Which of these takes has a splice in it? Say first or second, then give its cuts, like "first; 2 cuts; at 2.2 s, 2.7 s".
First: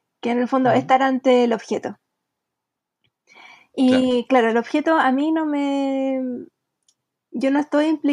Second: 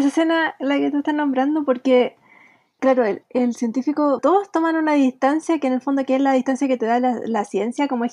second; 2 cuts; at 2.8 s, 4.2 s